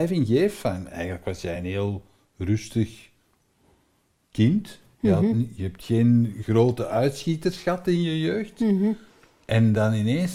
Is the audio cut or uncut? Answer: uncut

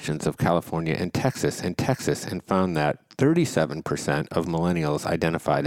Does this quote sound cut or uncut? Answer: cut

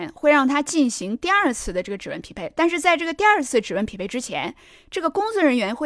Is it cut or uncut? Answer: uncut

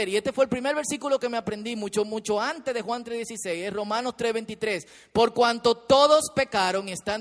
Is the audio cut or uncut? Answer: uncut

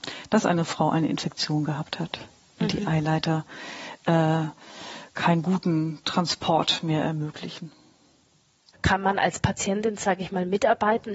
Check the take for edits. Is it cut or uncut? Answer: uncut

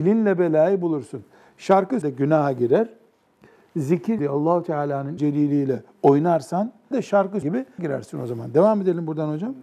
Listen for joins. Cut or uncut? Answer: cut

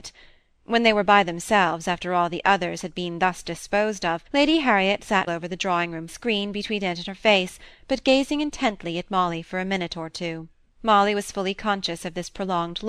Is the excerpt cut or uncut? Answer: cut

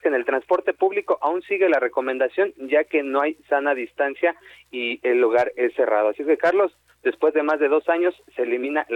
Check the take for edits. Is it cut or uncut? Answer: uncut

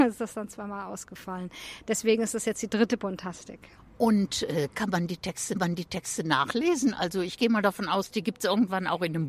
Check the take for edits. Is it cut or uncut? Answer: cut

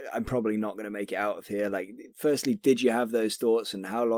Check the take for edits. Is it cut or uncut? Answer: uncut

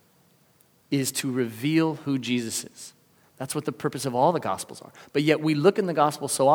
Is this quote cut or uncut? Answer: uncut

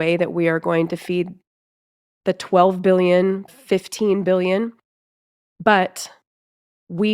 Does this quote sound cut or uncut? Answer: cut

